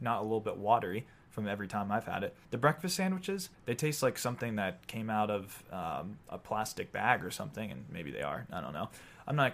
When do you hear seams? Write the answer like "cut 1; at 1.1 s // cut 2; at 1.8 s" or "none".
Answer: cut 1; at 2.4 s // cut 2; at 3.5 s